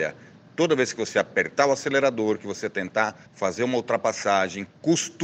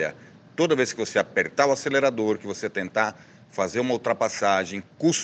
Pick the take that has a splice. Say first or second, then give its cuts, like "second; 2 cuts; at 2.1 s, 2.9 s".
first; 1 cut; at 3.3 s